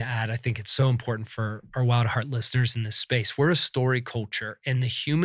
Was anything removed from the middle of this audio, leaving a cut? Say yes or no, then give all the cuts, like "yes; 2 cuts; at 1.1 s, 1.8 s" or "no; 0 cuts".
no; 0 cuts